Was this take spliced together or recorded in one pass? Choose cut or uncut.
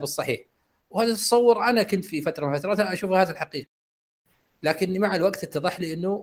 uncut